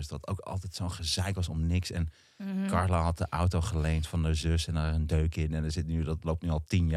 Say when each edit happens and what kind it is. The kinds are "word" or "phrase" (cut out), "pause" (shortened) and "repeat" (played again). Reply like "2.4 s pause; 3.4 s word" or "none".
none